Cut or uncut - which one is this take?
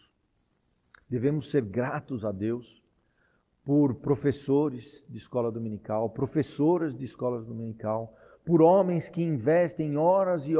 uncut